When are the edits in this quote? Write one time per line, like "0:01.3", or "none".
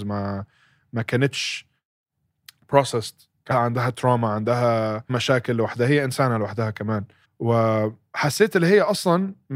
0:03.5
0:05.1
0:07.2